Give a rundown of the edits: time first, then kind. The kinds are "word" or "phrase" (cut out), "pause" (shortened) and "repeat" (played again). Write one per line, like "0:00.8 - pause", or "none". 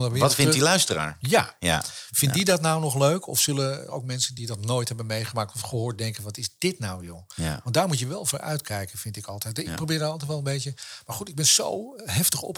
none